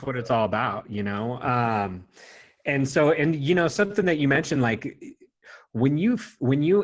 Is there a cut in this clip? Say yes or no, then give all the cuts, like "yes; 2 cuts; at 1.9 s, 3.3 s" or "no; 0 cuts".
no; 0 cuts